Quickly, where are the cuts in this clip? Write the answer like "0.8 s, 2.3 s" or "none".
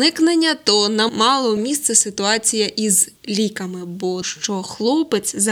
1.1 s, 1.6 s, 3.2 s, 4.2 s